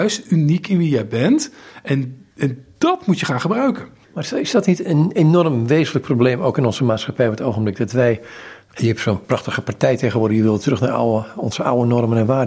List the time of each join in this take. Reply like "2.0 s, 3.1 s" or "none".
2.3 s